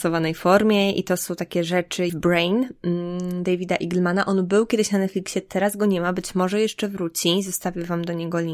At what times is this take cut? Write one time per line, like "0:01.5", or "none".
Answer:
0:02.1

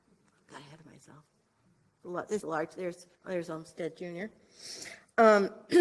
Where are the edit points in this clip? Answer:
0:02.4
0:03.1

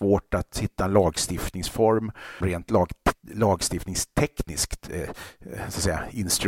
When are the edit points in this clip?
0:02.4

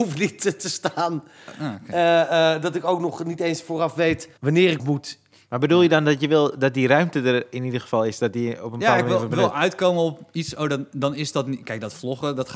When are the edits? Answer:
0:04.4
0:04.8

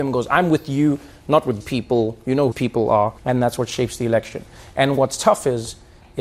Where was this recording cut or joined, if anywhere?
0:01.6
0:02.5
0:03.2

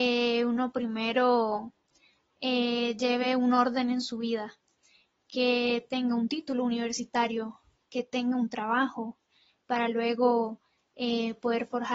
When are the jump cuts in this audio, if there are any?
none

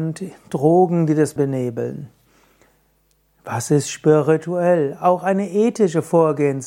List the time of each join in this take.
0:01.4

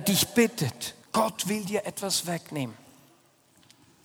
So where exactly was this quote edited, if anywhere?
0:01.0

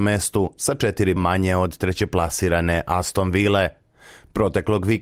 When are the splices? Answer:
0:01.2

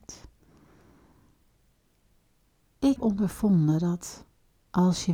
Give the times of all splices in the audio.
0:03.0

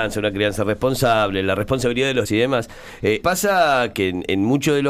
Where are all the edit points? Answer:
0:02.2
0:03.2
0:03.9

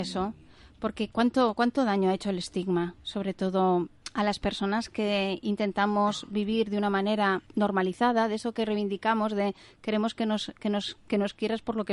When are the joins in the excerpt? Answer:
0:07.5

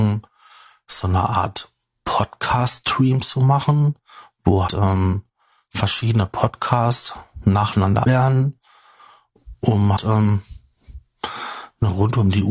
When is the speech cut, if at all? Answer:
0:04.7
0:08.0
0:10.0

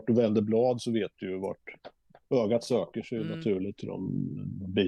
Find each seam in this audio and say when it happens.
none

